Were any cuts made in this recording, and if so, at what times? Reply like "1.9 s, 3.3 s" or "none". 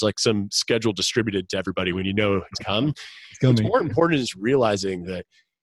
2.6 s